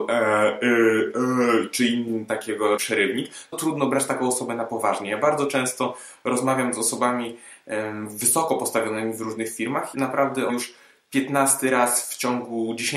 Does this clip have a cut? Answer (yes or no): yes